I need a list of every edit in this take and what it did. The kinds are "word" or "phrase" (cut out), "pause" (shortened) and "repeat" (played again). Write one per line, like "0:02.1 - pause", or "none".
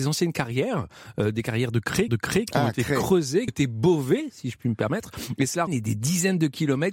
0:02.1 - repeat
0:03.5 - phrase
0:05.7 - phrase